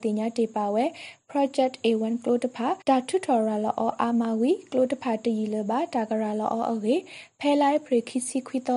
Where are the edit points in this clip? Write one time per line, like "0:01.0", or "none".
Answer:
0:02.8